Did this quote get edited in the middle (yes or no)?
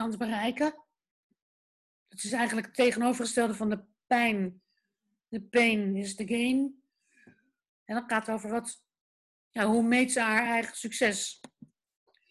no